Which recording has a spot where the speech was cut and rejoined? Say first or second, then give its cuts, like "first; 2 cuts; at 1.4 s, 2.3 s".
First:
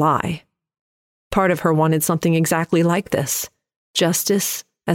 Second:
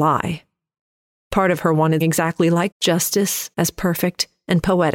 second; 3 cuts; at 2.0 s, 2.7 s, 3.5 s